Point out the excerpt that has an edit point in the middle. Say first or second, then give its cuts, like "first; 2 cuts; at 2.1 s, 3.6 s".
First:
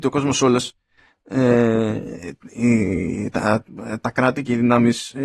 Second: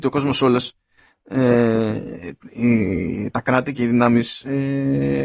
second; 1 cut; at 3.3 s